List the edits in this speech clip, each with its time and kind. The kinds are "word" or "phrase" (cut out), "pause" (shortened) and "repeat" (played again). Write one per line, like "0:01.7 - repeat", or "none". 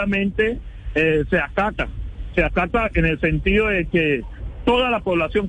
none